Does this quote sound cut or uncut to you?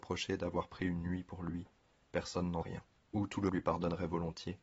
cut